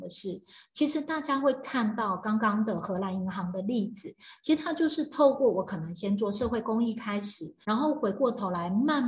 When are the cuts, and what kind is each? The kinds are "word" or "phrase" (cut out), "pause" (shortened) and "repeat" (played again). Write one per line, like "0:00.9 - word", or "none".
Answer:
0:07.6 - pause